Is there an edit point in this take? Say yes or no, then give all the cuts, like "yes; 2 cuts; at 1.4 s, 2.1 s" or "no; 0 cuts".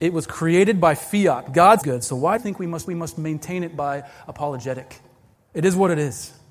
yes; 4 cuts; at 1.8 s, 2.4 s, 2.9 s, 5.4 s